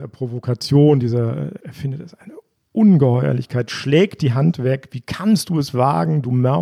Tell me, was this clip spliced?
no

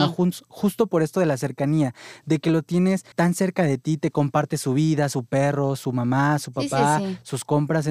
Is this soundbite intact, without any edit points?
no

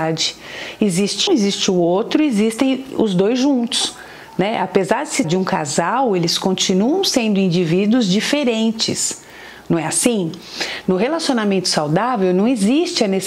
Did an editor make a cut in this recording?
yes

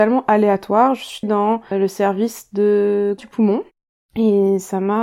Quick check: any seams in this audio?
yes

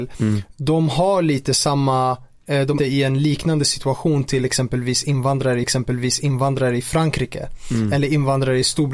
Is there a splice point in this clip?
yes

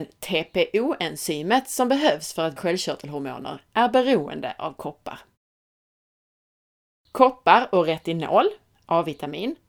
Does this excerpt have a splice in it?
yes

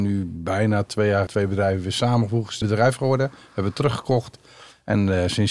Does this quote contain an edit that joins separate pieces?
yes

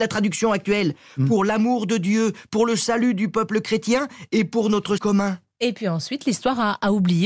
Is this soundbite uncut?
no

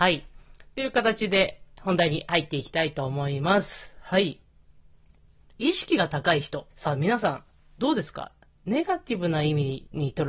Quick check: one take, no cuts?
no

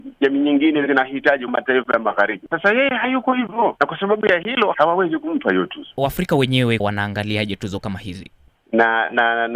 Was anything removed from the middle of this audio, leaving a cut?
yes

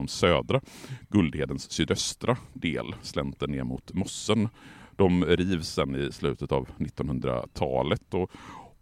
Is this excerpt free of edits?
yes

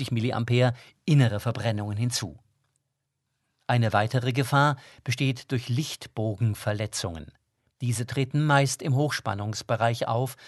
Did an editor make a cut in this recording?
no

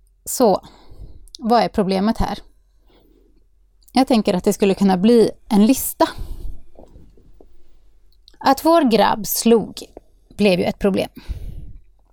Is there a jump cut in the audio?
no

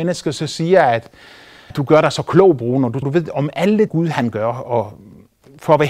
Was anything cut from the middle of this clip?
yes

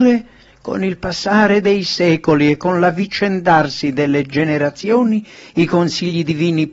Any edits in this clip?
no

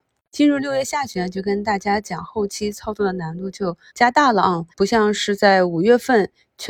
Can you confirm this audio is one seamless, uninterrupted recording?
no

